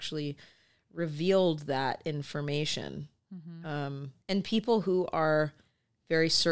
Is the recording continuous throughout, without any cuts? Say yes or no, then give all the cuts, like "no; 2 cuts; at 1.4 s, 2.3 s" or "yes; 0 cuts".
no; 1 cut; at 4.2 s